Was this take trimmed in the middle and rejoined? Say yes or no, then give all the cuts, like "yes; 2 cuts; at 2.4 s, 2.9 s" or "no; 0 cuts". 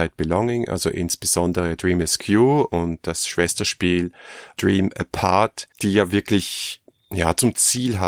yes; 1 cut; at 5.7 s